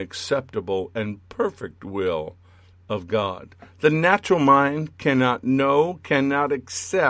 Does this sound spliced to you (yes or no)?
no